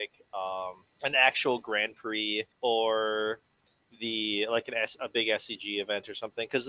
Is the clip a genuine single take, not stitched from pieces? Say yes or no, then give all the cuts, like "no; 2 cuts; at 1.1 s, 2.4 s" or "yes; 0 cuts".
no; 2 cuts; at 0.9 s, 2.5 s